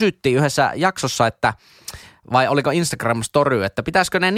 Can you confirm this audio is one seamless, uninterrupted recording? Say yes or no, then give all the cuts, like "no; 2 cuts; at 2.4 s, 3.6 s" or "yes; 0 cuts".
yes; 0 cuts